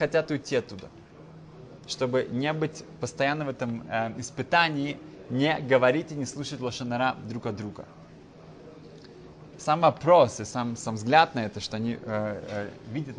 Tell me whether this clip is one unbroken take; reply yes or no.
no